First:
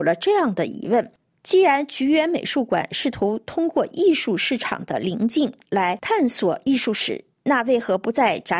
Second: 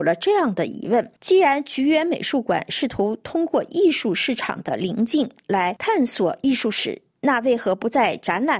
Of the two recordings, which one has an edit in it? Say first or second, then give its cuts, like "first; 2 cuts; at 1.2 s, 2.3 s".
second; 1 cut; at 1.2 s